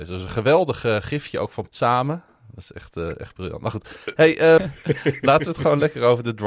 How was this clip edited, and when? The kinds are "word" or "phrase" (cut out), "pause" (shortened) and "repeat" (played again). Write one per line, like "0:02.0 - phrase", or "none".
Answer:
0:01.7 - phrase
0:04.6 - word